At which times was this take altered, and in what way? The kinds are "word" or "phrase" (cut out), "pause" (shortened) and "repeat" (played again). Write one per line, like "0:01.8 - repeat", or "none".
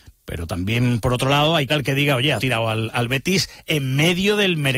0:01.7 - word
0:02.4 - word